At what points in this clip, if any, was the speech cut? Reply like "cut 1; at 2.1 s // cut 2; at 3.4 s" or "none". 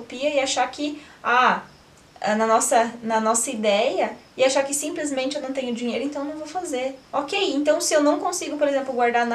cut 1; at 7.0 s